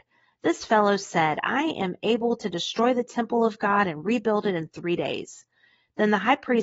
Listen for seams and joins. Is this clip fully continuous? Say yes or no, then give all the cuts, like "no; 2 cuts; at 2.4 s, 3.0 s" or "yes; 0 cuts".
yes; 0 cuts